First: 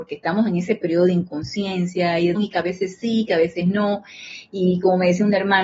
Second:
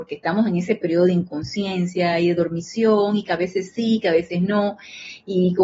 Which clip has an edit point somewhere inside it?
first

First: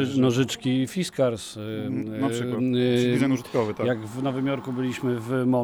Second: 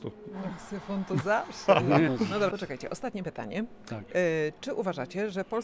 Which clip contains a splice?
second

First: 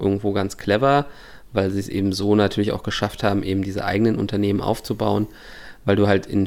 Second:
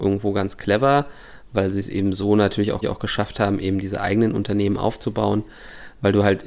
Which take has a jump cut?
second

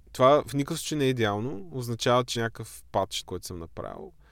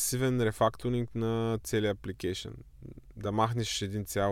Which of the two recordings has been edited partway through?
first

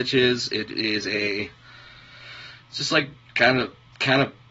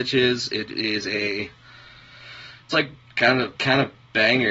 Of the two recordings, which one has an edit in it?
second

